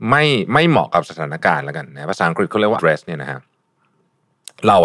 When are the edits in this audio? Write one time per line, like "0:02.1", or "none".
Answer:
0:02.8